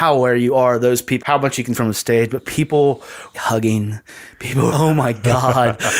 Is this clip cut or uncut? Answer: cut